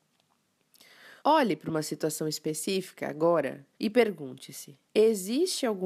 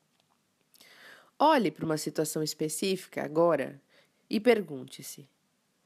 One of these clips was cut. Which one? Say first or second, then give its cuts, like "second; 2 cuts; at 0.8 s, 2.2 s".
first; 3 cuts; at 1.2 s, 3.7 s, 4.9 s